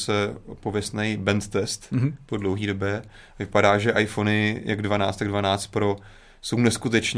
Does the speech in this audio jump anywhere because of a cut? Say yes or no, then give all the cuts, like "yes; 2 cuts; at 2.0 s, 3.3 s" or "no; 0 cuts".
no; 0 cuts